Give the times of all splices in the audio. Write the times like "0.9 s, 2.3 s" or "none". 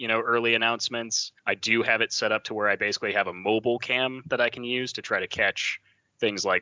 1.4 s